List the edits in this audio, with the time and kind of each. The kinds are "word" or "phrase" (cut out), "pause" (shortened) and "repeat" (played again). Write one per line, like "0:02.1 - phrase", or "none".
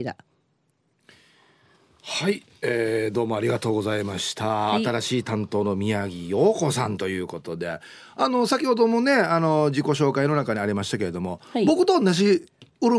none